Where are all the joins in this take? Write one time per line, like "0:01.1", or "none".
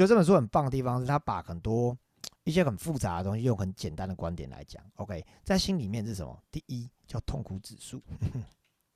0:02.4
0:08.0